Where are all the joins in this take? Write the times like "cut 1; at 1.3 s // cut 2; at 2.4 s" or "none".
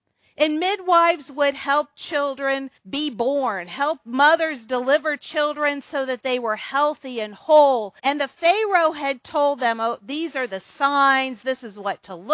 cut 1; at 2.8 s // cut 2; at 8.0 s